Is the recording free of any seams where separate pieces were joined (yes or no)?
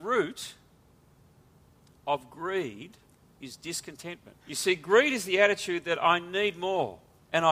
no